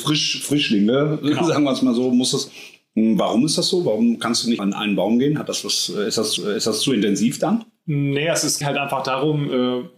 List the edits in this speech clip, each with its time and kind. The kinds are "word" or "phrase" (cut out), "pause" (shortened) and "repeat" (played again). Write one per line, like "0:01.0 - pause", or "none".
0:04.6 - word
0:06.4 - repeat
0:08.6 - word